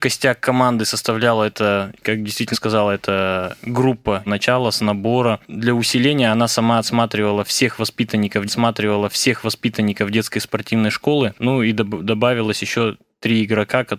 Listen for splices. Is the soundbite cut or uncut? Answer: cut